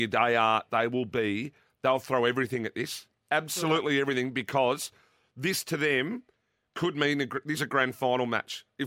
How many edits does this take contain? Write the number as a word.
one